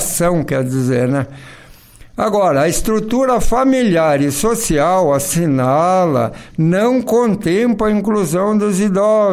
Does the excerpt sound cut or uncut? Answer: uncut